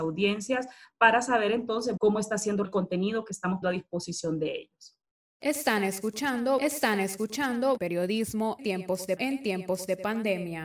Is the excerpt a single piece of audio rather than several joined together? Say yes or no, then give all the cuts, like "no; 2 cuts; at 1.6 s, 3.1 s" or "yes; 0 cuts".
no; 6 cuts; at 2.0 s, 2.6 s, 3.6 s, 7.8 s, 8.6 s, 9.2 s